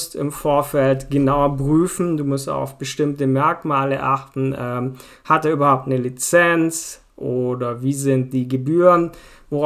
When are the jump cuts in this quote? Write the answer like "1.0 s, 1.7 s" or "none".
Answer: none